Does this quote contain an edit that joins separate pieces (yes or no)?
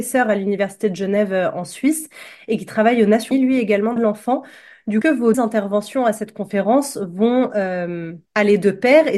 yes